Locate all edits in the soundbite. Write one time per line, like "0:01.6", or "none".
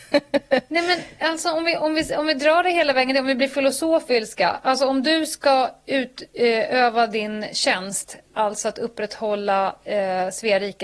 none